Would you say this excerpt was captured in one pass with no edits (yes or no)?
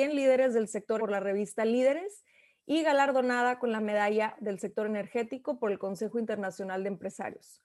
no